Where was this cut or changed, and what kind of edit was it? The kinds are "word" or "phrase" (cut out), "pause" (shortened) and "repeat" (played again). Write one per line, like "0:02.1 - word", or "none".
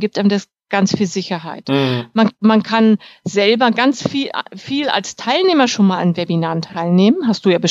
none